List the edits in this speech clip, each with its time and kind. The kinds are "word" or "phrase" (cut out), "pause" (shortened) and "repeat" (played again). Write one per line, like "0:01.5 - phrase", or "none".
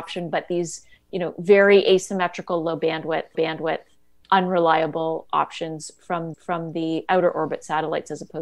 0:03.3 - repeat
0:06.3 - repeat